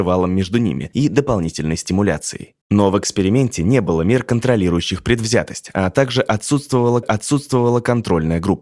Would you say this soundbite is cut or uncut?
cut